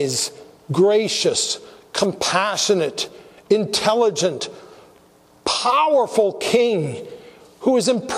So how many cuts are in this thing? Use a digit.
0